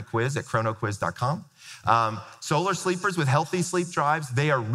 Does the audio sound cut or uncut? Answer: uncut